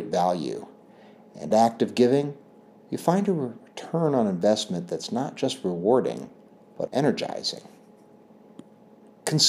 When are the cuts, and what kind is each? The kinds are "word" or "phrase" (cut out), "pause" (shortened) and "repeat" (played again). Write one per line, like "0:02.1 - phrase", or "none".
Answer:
0:01.5 - phrase
0:06.9 - word